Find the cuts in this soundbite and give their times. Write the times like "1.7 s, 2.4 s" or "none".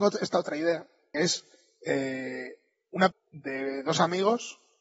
1.1 s, 3.1 s